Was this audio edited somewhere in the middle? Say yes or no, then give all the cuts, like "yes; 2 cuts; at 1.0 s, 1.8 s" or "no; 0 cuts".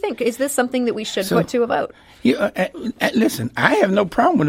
no; 0 cuts